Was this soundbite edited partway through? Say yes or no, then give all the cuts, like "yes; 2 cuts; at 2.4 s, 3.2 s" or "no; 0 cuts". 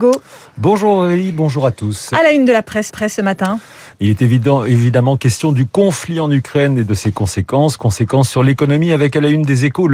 yes; 1 cut; at 2.9 s